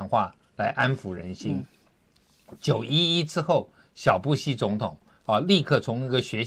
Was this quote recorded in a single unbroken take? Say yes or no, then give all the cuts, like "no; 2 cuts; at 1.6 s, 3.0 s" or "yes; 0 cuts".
yes; 0 cuts